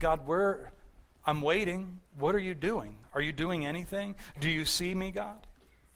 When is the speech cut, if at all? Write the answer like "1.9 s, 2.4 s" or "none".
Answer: none

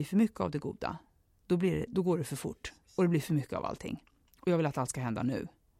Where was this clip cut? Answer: none

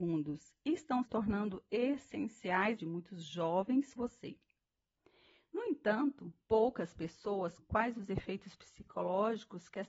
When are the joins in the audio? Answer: 1.0 s, 2.8 s, 4.0 s, 6.4 s, 7.6 s

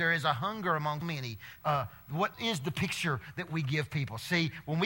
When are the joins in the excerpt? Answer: 1.0 s, 1.6 s, 2.3 s

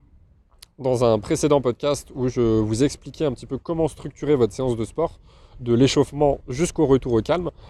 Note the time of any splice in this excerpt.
none

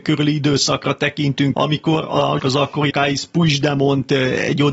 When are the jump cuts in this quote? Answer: 1.5 s, 2.4 s, 2.9 s

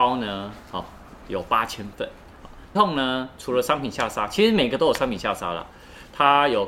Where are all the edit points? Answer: 2.7 s

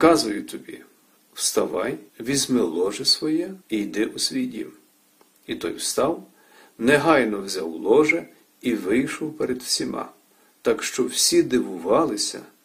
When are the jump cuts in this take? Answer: 2.1 s, 3.6 s

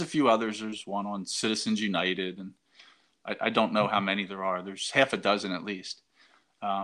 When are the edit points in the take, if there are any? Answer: none

